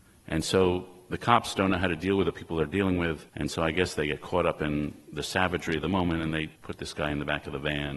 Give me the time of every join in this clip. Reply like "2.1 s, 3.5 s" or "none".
3.3 s, 6.6 s